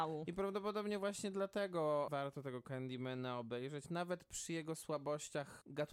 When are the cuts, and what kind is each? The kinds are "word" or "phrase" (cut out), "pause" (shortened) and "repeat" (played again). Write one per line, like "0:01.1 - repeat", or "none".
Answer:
0:02.1 - word